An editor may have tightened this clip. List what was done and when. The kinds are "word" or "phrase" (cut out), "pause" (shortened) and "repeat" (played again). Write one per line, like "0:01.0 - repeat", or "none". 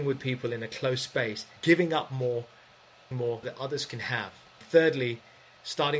0:01.6 - pause
0:03.1 - word
0:03.4 - word
0:04.6 - phrase